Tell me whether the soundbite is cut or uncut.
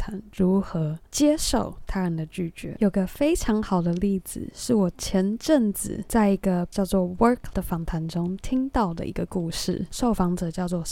cut